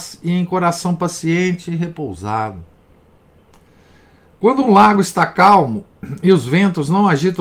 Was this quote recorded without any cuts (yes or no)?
yes